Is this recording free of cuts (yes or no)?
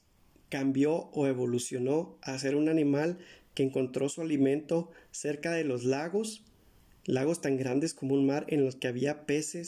yes